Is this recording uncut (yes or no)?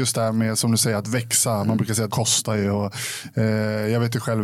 no